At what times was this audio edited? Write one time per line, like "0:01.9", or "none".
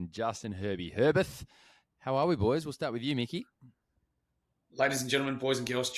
none